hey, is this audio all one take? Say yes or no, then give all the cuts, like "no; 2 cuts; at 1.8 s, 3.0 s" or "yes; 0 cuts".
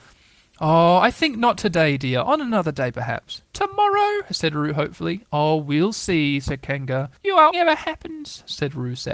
no; 3 cuts; at 3.5 s, 7.2 s, 7.5 s